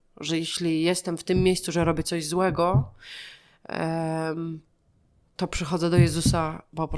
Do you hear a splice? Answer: no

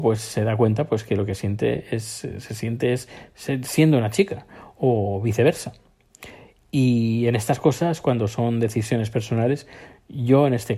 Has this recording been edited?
no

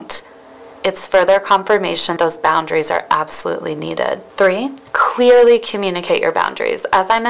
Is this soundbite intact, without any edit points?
no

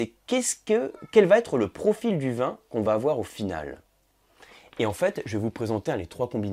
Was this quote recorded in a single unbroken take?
yes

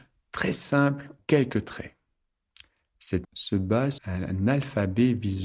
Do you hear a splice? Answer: yes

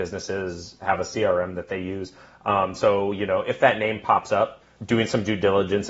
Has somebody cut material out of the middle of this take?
no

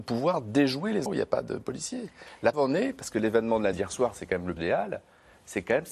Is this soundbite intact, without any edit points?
no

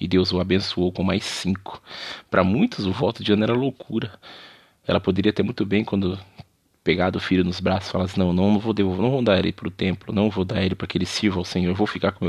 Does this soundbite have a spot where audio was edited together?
no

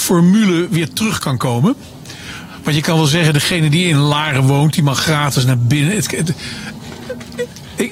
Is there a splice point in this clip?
no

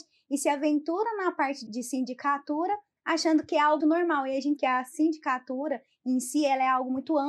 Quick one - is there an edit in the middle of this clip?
yes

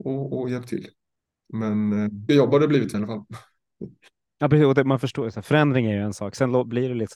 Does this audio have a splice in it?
yes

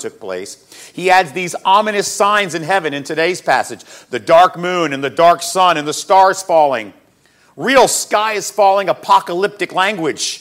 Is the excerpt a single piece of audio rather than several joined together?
yes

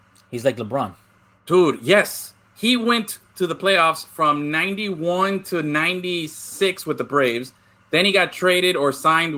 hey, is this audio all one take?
yes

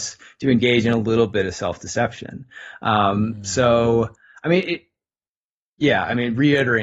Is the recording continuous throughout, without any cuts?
yes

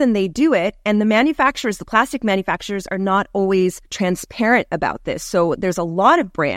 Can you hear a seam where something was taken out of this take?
yes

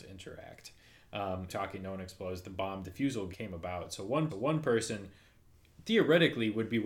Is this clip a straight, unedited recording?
no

